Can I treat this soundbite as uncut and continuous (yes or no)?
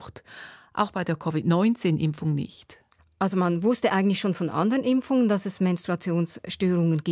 yes